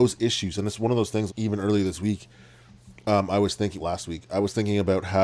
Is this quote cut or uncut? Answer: cut